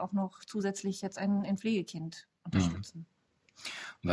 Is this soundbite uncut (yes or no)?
no